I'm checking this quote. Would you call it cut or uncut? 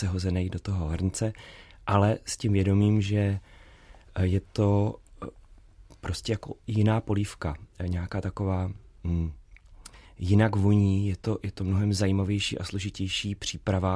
uncut